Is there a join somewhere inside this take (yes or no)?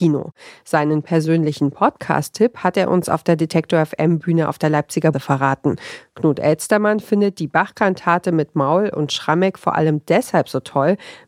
yes